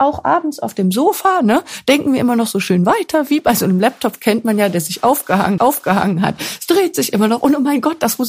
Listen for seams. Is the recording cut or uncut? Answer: cut